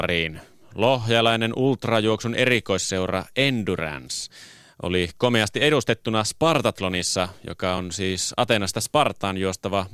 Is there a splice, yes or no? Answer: no